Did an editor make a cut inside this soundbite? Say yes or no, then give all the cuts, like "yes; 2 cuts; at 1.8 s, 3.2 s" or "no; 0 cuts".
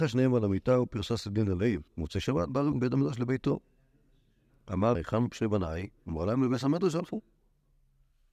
yes; 3 cuts; at 1.9 s, 2.7 s, 4.9 s